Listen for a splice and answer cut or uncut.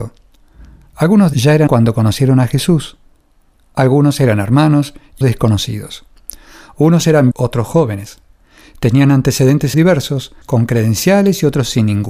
cut